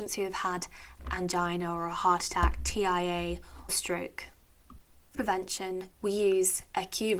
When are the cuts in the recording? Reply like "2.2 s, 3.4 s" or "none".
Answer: 3.7 s, 5.1 s, 5.9 s